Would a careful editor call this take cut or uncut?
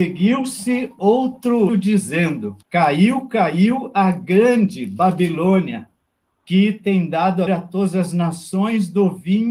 cut